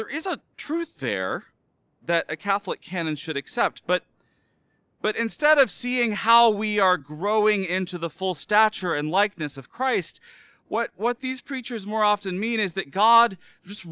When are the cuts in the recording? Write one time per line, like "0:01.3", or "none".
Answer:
none